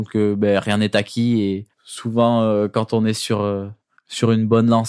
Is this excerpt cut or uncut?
cut